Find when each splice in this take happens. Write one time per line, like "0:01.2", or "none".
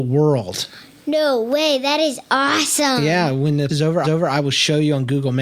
0:03.7
0:04.0